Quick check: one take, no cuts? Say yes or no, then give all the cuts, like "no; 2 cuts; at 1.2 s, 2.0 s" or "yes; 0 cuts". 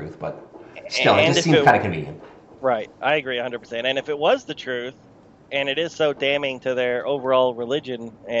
yes; 0 cuts